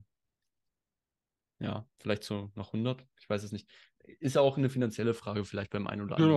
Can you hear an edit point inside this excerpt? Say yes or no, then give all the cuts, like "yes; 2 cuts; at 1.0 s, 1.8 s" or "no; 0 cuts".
yes; 1 cut; at 1.9 s